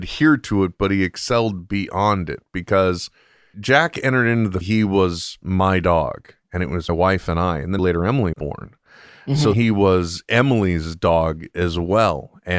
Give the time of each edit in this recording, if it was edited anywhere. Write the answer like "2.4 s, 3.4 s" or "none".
3.5 s, 4.6 s, 6.9 s, 7.8 s, 8.3 s, 9.5 s